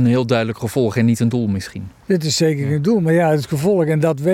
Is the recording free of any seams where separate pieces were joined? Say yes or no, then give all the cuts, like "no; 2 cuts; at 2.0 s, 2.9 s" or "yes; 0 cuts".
yes; 0 cuts